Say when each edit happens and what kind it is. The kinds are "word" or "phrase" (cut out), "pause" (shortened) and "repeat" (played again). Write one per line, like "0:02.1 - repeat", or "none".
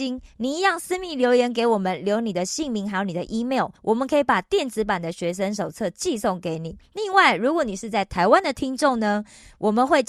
0:03.8 - pause
0:06.9 - pause